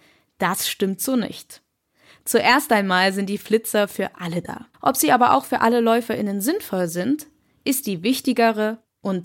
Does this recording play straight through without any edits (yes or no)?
no